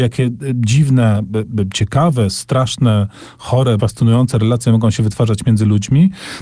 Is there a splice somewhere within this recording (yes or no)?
yes